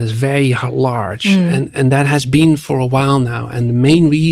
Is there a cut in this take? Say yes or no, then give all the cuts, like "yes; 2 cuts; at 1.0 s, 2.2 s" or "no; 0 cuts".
no; 0 cuts